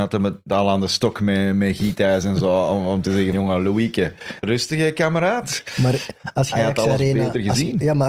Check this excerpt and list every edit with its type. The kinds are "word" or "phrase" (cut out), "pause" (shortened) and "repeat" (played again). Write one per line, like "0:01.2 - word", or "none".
0:03.3 - word
0:04.4 - word
0:06.5 - phrase